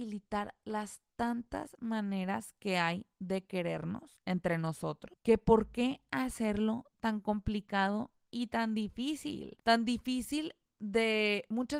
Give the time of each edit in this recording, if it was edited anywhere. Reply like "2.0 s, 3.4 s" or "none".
none